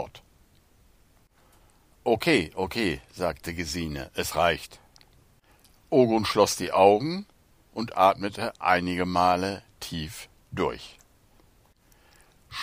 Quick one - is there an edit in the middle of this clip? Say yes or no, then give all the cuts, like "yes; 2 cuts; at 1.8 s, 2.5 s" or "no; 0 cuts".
no; 0 cuts